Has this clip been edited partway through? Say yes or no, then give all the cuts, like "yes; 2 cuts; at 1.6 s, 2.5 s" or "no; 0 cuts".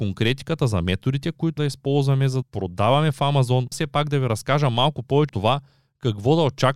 yes; 4 cuts; at 1.6 s, 2.4 s, 3.7 s, 5.3 s